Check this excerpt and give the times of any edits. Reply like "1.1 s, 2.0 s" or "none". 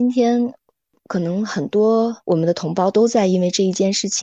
2.2 s